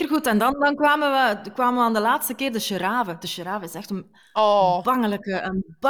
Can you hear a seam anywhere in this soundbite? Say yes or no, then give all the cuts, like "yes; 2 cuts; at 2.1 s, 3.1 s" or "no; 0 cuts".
no; 0 cuts